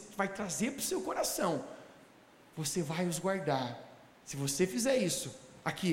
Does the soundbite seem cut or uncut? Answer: uncut